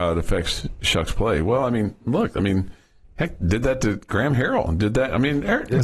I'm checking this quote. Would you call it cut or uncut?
uncut